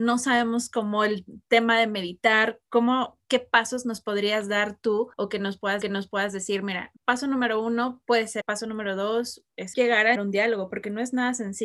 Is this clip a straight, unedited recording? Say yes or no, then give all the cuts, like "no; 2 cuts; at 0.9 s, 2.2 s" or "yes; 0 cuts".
no; 6 cuts; at 5.1 s, 5.8 s, 7.0 s, 8.4 s, 9.7 s, 10.2 s